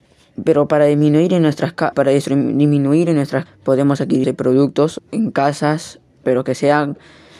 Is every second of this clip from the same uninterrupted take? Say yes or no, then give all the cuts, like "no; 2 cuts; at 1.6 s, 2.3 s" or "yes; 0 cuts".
no; 5 cuts; at 1.9 s, 3.5 s, 4.2 s, 5.0 s, 6.2 s